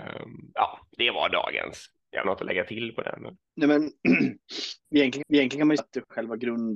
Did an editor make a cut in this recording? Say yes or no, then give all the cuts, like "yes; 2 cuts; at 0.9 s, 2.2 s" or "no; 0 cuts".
yes; 4 cuts; at 2.2 s, 3.5 s, 5.2 s, 5.8 s